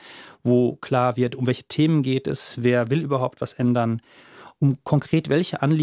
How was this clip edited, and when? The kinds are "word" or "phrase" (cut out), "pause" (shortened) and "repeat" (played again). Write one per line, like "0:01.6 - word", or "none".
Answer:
none